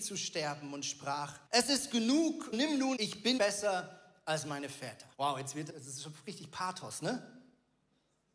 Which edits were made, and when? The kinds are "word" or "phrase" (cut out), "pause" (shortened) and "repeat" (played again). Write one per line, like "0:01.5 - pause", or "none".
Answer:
0:01.5 - pause
0:02.5 - word
0:03.0 - phrase
0:03.4 - word
0:05.1 - pause
0:05.7 - phrase